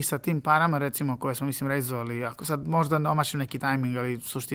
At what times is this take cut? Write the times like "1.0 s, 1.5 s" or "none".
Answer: none